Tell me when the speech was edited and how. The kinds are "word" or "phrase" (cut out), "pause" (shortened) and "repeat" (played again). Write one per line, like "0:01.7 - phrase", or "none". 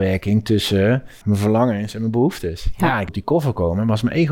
0:01.2 - word
0:03.1 - word